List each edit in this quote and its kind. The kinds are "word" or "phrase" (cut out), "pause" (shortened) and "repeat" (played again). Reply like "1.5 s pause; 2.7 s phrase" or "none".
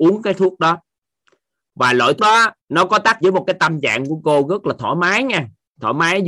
2.2 s word; 2.6 s pause; 3.2 s word